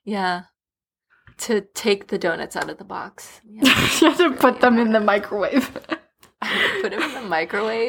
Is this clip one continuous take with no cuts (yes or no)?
yes